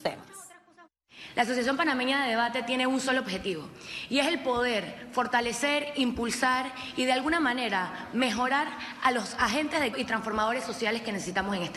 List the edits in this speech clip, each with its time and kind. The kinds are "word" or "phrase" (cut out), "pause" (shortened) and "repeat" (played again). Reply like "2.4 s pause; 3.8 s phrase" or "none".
9.9 s word